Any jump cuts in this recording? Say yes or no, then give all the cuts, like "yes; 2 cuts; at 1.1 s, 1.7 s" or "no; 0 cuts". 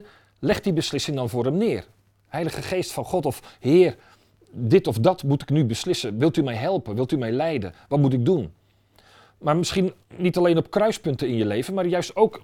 no; 0 cuts